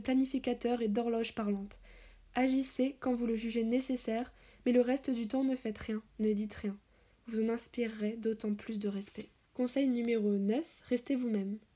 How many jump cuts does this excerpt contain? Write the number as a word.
zero